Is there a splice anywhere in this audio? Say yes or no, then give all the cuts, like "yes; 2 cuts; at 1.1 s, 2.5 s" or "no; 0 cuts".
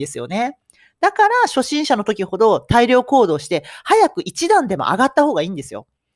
no; 0 cuts